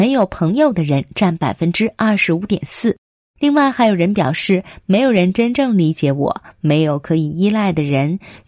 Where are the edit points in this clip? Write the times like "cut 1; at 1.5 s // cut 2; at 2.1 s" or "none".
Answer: none